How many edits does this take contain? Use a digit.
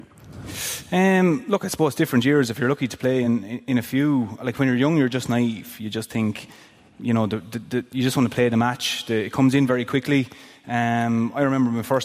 0